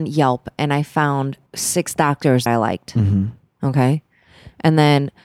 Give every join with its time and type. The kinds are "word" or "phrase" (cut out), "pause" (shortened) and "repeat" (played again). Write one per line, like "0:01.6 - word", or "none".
0:01.5 - pause
0:02.5 - word